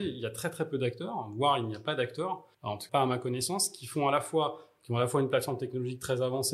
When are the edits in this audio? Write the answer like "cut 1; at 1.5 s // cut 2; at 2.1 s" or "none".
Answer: cut 1; at 2.5 s // cut 2; at 2.9 s